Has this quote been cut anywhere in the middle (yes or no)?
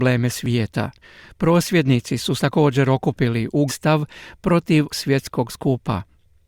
yes